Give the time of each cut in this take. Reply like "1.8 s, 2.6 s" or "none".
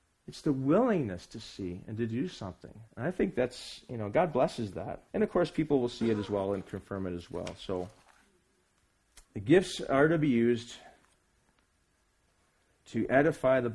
2.9 s, 5.1 s, 9.2 s